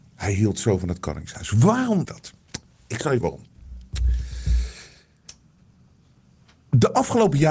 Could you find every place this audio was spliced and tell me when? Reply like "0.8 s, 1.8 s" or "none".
2.0 s, 3.2 s